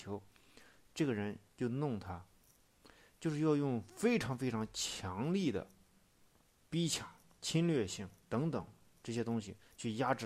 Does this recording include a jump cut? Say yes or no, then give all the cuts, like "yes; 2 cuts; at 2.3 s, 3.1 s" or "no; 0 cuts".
no; 0 cuts